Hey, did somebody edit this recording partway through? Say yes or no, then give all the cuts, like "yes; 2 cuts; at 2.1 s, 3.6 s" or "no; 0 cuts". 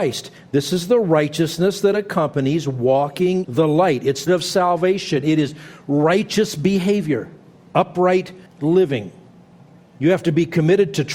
yes; 3 cuts; at 3.4 s, 4.3 s, 8.5 s